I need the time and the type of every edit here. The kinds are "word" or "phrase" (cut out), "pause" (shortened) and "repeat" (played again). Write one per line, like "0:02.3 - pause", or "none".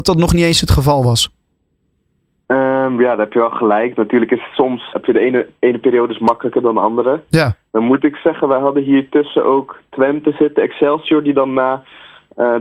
0:04.9 - word

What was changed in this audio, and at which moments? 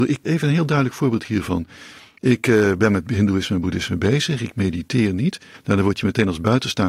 none

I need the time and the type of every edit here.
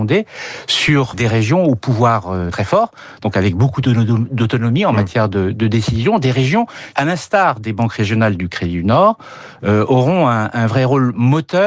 0:01.1 - word
0:02.5 - word
0:06.9 - word

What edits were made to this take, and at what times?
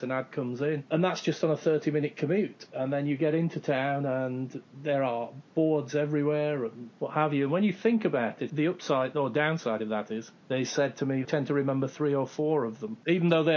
0:10.4 - pause
0:11.2 - phrase

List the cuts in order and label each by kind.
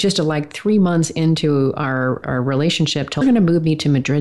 0:02.2 - word
0:03.2 - phrase

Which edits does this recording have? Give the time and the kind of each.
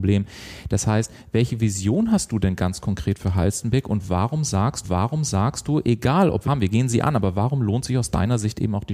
0:04.8 - repeat
0:06.4 - phrase

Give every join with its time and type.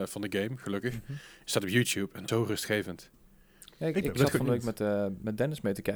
0:02.3 - phrase

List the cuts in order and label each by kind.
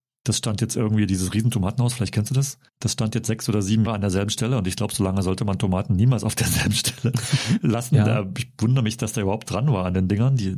0:02.7 - pause
0:03.9 - word
0:09.5 - phrase

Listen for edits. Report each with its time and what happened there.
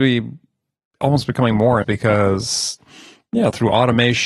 0:01.8 - word

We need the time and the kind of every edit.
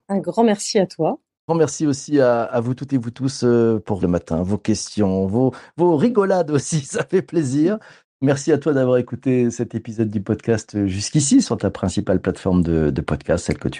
0:04.0 - phrase

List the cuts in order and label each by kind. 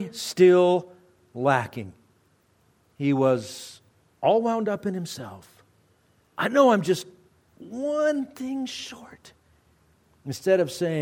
none

